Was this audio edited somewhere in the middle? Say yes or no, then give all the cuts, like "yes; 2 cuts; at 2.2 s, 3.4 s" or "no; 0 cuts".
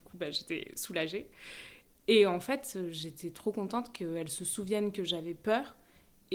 no; 0 cuts